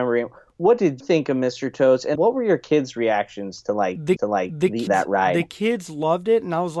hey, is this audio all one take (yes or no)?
no